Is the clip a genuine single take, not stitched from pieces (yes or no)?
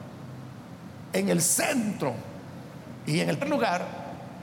no